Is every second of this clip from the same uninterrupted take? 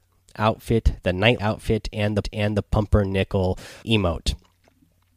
no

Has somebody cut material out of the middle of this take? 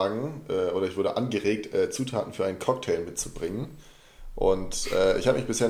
no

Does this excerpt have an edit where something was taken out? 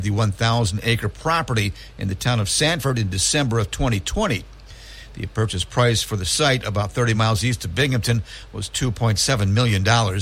no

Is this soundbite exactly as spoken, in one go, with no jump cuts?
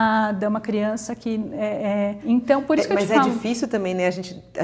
yes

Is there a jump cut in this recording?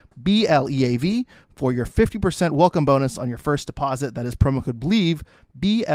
no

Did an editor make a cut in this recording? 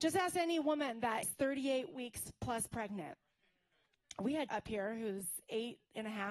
yes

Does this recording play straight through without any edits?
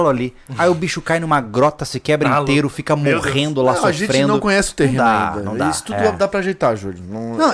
yes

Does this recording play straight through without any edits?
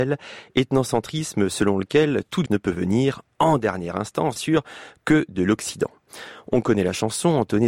no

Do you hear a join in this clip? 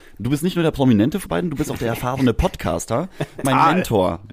yes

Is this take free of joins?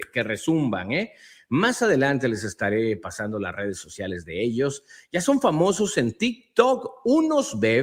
yes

